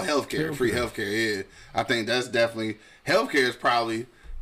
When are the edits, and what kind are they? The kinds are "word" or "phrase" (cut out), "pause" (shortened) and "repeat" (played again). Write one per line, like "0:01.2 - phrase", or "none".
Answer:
none